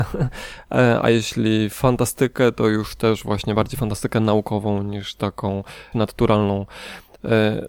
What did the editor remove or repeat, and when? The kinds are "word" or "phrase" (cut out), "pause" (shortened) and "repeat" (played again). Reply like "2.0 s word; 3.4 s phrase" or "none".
5.9 s word